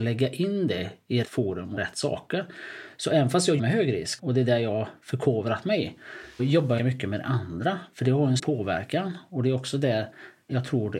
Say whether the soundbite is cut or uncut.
cut